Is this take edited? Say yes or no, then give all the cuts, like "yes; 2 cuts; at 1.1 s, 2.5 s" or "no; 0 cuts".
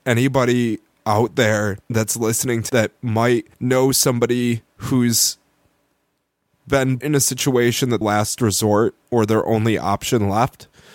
yes; 6 cuts; at 1.8 s, 2.7 s, 3.5 s, 4.7 s, 7.0 s, 8.0 s